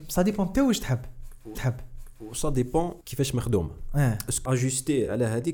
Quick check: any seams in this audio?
yes; 3 cuts; at 1.6 s, 3.0 s, 4.5 s

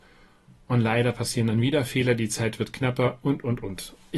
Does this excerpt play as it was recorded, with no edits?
yes; 0 cuts

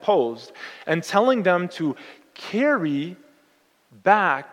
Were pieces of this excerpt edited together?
no; 0 cuts

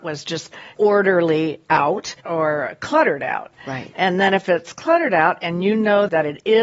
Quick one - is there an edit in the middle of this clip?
yes; 1 cut; at 2.2 s

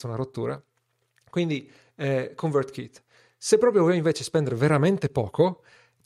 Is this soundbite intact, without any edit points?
yes; 0 cuts

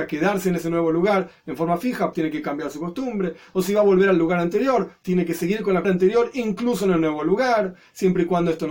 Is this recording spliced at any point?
yes; 3 cuts; at 2.1 s, 5.0 s, 5.8 s

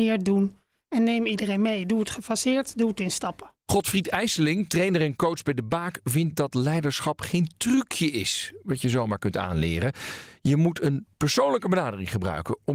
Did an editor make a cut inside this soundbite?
no; 0 cuts

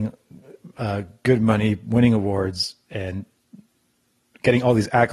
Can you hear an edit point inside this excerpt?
no; 0 cuts

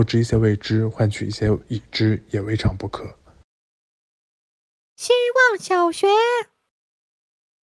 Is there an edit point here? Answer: no; 0 cuts

